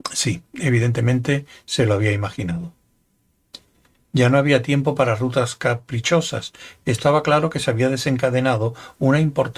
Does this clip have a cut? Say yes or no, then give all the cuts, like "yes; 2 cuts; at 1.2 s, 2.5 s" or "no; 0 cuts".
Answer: no; 0 cuts